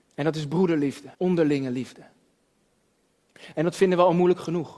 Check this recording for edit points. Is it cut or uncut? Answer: cut